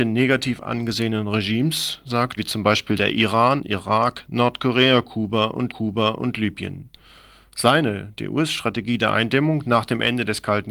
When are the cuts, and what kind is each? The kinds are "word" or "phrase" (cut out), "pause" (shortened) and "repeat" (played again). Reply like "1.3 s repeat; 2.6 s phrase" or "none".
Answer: 2.4 s word; 5.7 s repeat